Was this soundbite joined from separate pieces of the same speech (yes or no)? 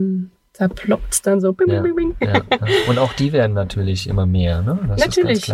no